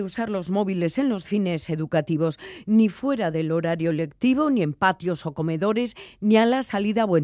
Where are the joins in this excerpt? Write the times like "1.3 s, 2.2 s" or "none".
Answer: 1.2 s